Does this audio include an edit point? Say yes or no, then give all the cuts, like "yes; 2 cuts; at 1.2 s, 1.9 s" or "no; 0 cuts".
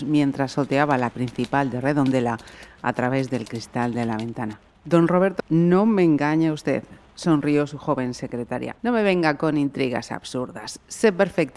yes; 3 cuts; at 1.1 s, 5.4 s, 8.8 s